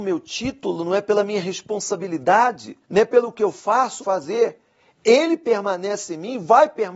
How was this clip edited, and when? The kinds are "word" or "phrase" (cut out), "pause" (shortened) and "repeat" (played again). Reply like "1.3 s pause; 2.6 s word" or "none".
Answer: 2.8 s pause; 4.0 s phrase